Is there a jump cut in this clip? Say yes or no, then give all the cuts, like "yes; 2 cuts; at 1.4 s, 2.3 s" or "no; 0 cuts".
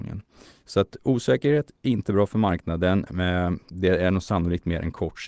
yes; 2 cuts; at 1.8 s, 3.6 s